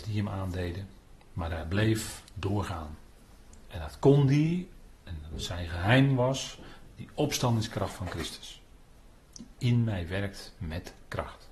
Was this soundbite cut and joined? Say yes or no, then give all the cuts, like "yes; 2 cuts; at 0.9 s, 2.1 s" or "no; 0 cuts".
no; 0 cuts